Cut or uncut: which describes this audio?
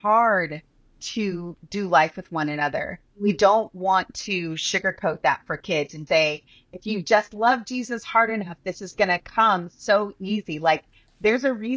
cut